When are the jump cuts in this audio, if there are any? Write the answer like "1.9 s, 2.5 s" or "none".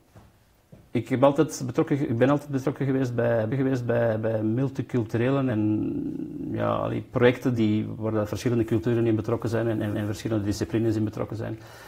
3.5 s, 5.5 s, 7.6 s, 9.9 s